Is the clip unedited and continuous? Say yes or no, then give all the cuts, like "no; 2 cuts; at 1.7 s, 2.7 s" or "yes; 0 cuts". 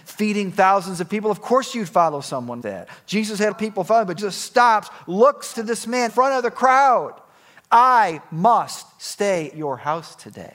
no; 6 cuts; at 2.6 s, 3.5 s, 4.2 s, 5.5 s, 6.1 s, 9.5 s